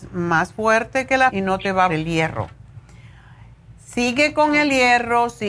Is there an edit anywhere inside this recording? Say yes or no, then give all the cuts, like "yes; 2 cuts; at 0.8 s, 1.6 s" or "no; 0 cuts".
yes; 3 cuts; at 1.3 s, 1.9 s, 3.8 s